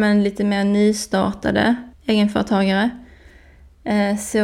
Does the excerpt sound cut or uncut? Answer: cut